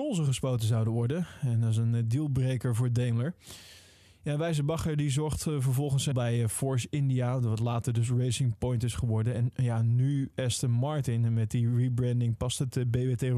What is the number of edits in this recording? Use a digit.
1